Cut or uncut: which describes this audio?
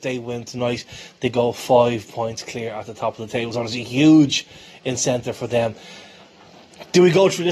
uncut